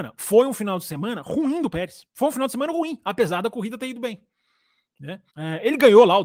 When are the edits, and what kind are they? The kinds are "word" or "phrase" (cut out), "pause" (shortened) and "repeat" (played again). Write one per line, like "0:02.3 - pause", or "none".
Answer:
0:02.1 - pause
0:05.3 - pause